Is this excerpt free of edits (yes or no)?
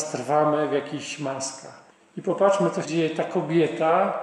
no